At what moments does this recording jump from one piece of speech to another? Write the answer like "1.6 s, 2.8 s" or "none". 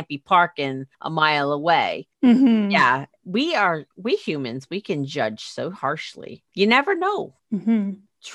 3.9 s, 6.5 s